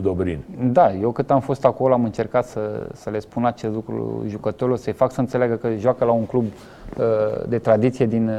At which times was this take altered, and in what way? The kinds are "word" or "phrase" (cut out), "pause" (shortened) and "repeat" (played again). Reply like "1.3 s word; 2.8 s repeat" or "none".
none